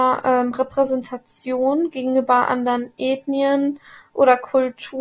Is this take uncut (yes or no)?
yes